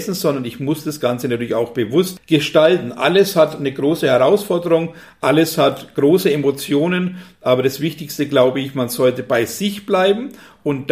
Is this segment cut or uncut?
uncut